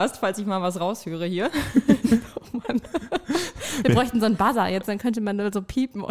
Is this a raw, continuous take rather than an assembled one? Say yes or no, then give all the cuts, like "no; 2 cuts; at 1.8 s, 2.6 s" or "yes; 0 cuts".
yes; 0 cuts